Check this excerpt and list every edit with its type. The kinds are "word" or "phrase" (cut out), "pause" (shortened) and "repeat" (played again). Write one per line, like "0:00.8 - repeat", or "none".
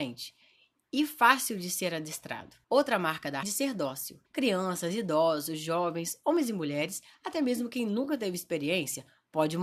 0:02.6 - pause
0:03.4 - phrase
0:04.3 - pause